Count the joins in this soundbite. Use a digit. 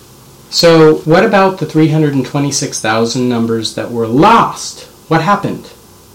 1